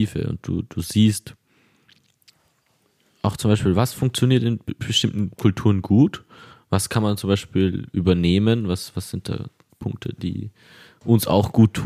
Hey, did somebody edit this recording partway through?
no; 0 cuts

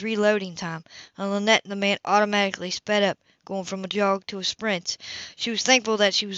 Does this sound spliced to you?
no; 0 cuts

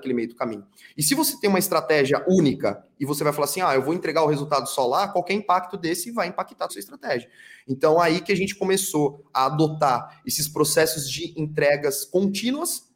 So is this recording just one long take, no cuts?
no; 1 cut; at 6.7 s

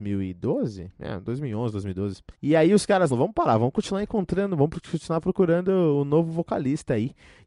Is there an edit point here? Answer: yes; 2 cuts; at 2.3 s, 3.1 s

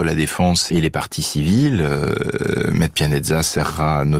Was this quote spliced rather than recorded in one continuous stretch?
no; 0 cuts

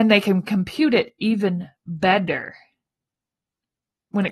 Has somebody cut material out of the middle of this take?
no; 0 cuts

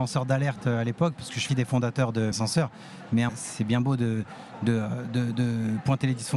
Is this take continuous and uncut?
no; 3 cuts; at 1.5 s, 2.3 s, 3.3 s

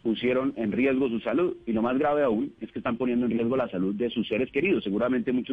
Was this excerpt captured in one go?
yes; 0 cuts

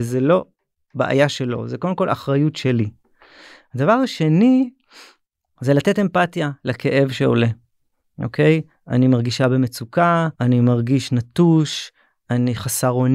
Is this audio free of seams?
no; 1 cut; at 10.3 s

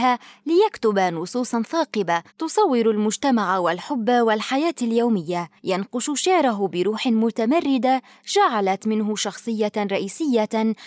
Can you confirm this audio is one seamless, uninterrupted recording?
no; 2 cuts; at 2.3 s, 5.6 s

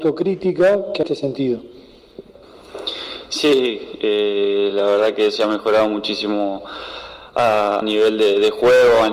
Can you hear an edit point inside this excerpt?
yes; 3 cuts; at 1.0 s, 5.4 s, 7.8 s

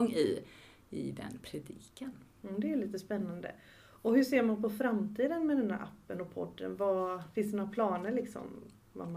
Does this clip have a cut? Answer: no; 0 cuts

